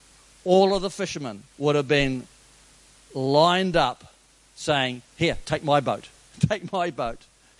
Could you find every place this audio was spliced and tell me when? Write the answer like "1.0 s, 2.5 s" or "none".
1.5 s, 5.1 s

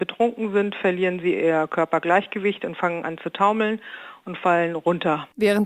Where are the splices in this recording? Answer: none

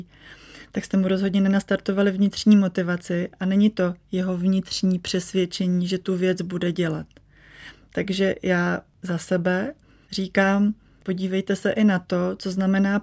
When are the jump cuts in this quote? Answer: none

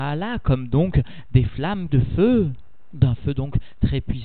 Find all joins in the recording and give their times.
1.9 s

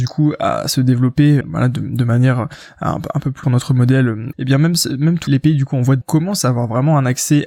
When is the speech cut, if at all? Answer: 1.4 s, 3.4 s, 4.3 s, 5.3 s, 6.0 s

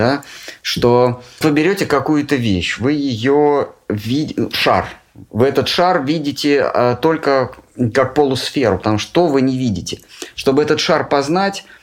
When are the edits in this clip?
1.4 s

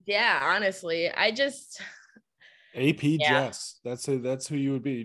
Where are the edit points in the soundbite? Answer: none

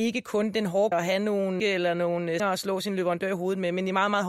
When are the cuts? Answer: 0.9 s, 1.6 s, 2.4 s

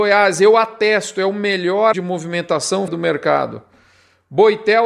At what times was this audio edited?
1.9 s, 2.9 s

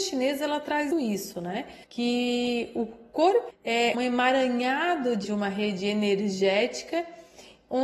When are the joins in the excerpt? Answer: 0.9 s, 1.8 s, 3.5 s, 3.9 s, 5.2 s

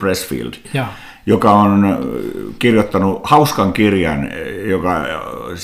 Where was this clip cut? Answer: 1.1 s

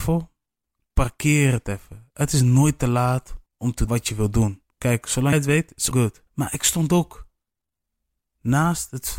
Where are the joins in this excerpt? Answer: 3.5 s, 3.9 s, 4.7 s, 5.3 s, 5.9 s, 6.3 s

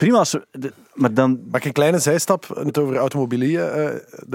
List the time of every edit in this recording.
2.7 s

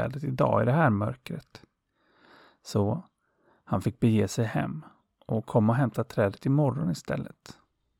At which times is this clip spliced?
none

